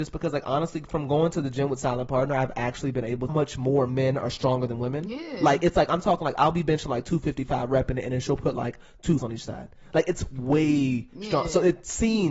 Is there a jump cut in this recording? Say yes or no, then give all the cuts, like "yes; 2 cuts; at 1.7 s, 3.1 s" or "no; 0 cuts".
yes; 2 cuts; at 3.3 s, 9.2 s